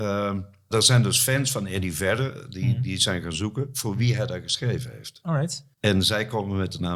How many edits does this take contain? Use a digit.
1